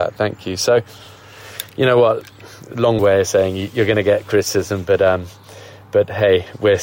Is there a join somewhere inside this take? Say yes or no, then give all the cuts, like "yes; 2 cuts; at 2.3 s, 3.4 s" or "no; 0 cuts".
yes; 1 cut; at 3.0 s